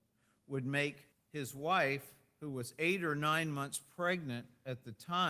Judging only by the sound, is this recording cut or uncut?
cut